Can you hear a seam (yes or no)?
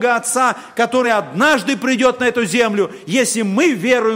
no